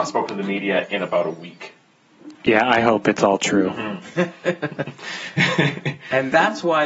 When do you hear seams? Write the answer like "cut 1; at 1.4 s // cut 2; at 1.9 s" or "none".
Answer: cut 1; at 2.3 s